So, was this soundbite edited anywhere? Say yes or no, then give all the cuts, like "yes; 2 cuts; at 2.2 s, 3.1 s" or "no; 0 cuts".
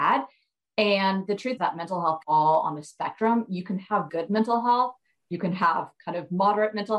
yes; 3 cuts; at 1.6 s, 2.2 s, 4.1 s